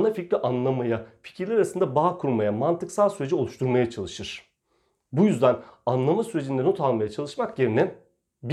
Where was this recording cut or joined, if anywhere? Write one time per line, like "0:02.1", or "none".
none